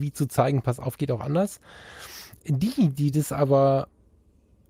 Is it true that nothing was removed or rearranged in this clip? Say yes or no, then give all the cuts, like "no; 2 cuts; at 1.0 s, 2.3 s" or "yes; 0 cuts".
yes; 0 cuts